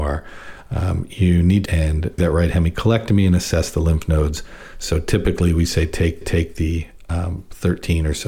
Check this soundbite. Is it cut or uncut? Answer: cut